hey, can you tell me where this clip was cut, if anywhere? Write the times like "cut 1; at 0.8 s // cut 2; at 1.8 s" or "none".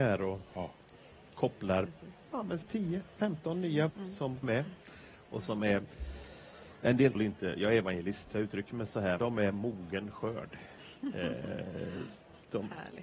cut 1; at 1.9 s // cut 2; at 2.6 s // cut 3; at 3.9 s // cut 4; at 4.4 s // cut 5; at 7.1 s // cut 6; at 9.2 s